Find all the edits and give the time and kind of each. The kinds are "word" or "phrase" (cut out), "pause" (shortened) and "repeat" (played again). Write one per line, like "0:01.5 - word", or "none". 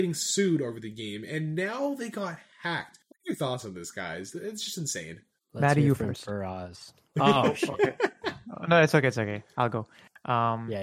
0:03.0 - pause
0:05.4 - pause